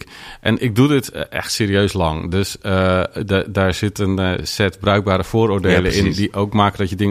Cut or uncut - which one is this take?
uncut